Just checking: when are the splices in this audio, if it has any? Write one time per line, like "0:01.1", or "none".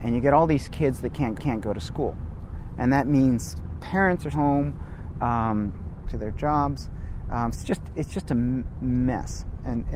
0:01.4
0:04.3
0:06.0
0:07.5